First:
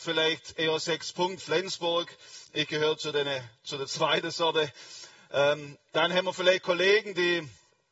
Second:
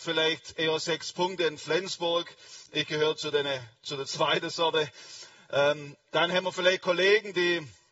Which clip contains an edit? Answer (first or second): first